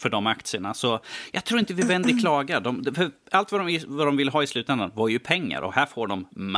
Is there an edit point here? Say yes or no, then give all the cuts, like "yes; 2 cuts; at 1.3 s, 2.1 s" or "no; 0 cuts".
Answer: no; 0 cuts